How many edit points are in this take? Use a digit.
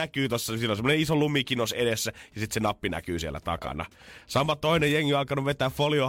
0